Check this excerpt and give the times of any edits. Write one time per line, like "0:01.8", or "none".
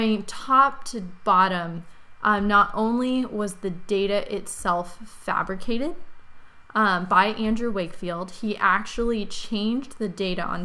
none